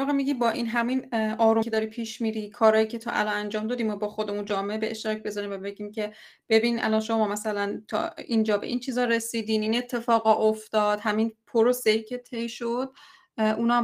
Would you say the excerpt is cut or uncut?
cut